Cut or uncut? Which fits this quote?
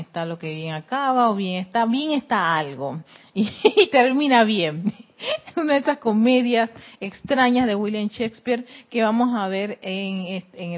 uncut